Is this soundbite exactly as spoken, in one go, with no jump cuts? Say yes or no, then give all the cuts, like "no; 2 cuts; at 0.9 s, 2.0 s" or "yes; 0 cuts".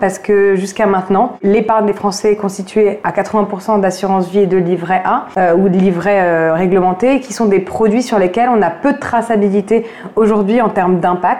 yes; 0 cuts